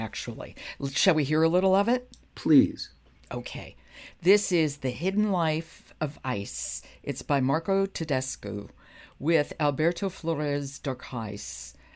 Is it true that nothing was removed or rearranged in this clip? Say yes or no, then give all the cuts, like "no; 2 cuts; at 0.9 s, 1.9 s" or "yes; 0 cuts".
yes; 0 cuts